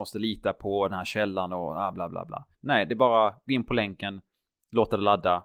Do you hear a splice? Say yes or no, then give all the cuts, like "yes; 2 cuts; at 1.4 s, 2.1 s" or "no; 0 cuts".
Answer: yes; 2 cuts; at 1.9 s, 2.5 s